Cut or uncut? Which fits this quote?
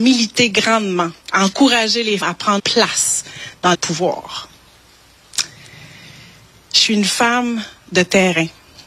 cut